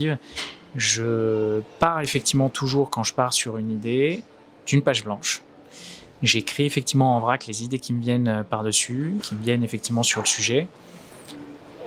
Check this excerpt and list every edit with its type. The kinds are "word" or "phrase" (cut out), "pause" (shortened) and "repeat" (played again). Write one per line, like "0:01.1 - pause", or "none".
0:09.2 - word